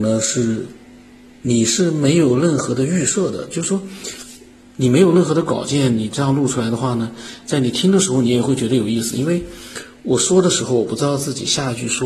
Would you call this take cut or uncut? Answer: uncut